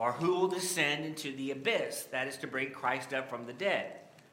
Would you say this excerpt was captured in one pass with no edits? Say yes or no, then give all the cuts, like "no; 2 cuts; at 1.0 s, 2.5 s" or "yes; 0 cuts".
yes; 0 cuts